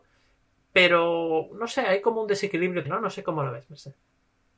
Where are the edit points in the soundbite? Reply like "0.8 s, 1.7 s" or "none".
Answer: 2.8 s